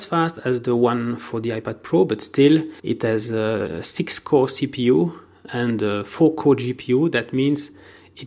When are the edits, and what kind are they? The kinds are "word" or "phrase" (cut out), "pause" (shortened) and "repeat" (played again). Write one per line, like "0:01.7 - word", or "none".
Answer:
0:02.8 - pause